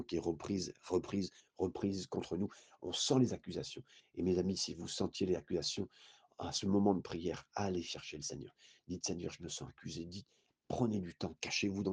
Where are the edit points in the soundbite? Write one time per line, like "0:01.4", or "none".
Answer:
none